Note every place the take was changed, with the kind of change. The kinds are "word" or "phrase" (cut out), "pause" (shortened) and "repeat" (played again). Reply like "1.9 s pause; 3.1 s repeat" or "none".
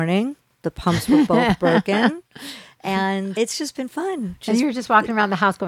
3.4 s word